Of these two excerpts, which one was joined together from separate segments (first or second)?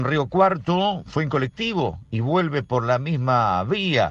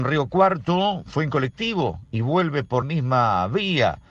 second